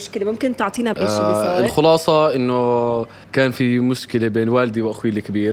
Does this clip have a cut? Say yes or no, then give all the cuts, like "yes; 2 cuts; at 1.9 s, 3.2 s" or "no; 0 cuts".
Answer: yes; 2 cuts; at 0.9 s, 3.2 s